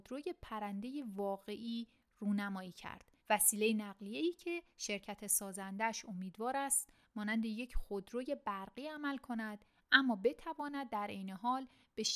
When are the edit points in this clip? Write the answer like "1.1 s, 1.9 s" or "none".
3.2 s